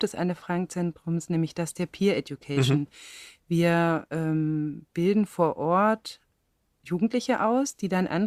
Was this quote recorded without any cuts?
yes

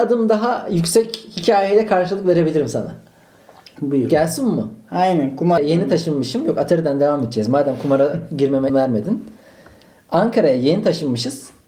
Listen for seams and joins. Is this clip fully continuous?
no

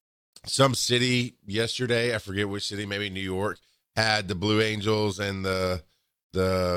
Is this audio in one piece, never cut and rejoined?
yes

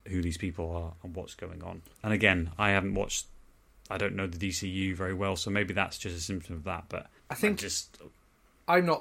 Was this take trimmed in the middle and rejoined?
yes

